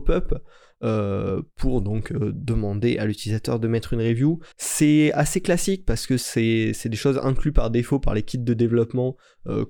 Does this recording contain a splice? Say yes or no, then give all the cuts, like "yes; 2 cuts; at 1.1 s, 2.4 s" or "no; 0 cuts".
yes; 1 cut; at 4.5 s